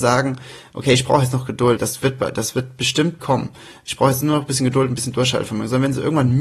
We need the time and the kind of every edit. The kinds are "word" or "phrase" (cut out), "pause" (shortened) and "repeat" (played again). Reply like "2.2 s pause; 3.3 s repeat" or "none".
1.8 s word; 3.2 s word